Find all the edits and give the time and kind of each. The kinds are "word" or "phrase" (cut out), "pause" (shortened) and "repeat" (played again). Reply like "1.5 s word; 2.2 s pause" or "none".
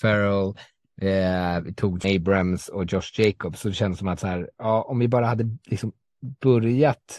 2.0 s word